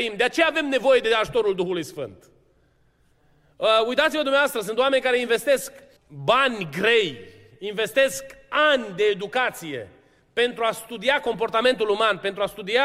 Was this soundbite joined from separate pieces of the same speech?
yes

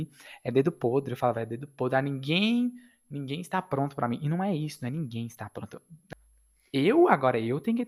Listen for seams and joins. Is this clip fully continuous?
yes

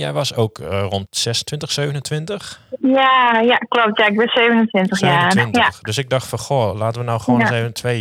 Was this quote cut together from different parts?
yes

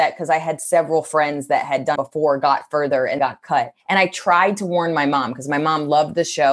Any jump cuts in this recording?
yes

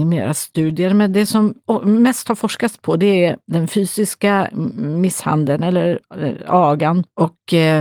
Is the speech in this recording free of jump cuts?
yes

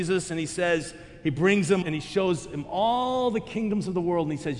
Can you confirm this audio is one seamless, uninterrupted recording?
no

